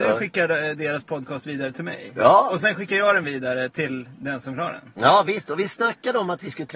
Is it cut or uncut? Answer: uncut